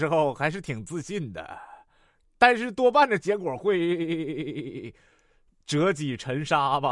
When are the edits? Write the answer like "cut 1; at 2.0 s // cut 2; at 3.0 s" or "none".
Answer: none